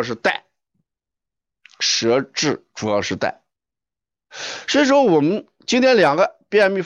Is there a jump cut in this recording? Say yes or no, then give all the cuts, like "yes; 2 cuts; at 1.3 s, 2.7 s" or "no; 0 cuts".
no; 0 cuts